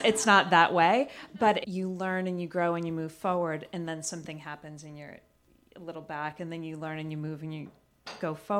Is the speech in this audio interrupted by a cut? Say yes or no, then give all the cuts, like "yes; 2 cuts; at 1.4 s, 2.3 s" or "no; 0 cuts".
yes; 1 cut; at 1.6 s